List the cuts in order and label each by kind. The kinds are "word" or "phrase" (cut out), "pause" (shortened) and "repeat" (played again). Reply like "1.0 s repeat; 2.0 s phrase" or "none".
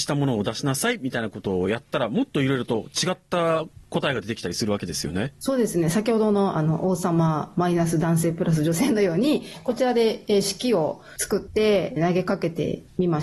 5.4 s pause